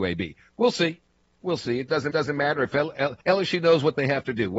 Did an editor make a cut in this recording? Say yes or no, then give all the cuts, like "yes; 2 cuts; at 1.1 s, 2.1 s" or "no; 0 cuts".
yes; 2 cuts; at 2.1 s, 3.2 s